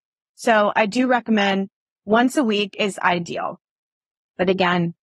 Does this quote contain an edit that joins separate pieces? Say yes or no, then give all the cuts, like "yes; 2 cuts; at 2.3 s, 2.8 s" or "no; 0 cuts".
no; 0 cuts